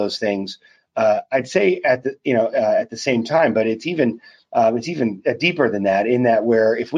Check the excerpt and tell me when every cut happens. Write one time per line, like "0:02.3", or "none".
none